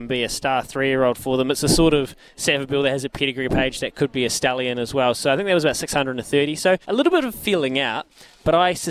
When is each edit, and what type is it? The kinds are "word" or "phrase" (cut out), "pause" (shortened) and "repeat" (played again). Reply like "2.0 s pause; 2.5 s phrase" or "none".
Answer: 6.8 s pause